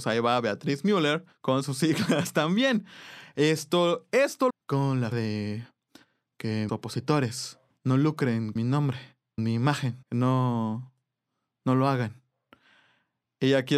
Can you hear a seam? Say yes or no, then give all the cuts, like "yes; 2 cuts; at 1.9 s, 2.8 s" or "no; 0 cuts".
yes; 8 cuts; at 1.3 s, 4.5 s, 5.1 s, 6.7 s, 7.7 s, 8.6 s, 9.4 s, 10.0 s